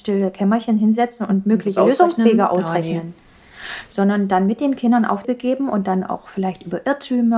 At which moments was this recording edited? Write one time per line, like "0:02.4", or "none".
0:05.2